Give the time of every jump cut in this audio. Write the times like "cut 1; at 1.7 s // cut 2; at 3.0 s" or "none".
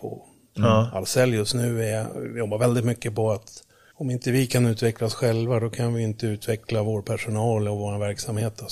none